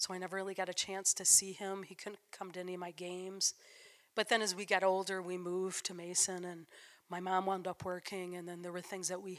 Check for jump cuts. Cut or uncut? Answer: uncut